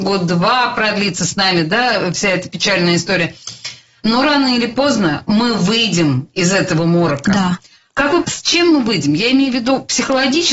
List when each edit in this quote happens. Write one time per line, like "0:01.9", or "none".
0:08.2